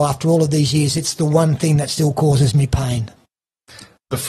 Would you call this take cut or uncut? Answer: uncut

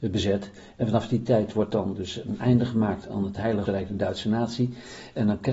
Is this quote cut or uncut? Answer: cut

